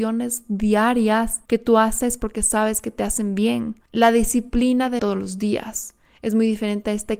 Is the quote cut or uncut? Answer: cut